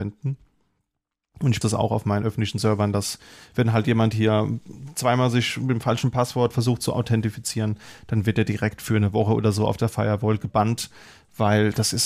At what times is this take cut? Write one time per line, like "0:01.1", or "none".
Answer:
0:01.6